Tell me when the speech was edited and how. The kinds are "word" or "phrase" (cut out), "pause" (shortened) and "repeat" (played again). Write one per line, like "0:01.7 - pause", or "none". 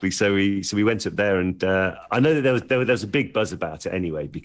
none